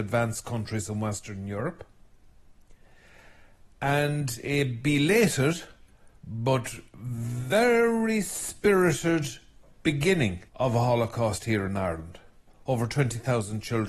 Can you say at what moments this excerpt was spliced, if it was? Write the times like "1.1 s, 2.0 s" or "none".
3.7 s, 6.2 s, 10.5 s